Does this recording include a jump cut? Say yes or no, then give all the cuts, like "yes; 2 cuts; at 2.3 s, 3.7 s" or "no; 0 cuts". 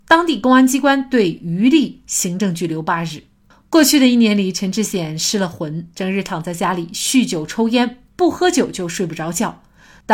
no; 0 cuts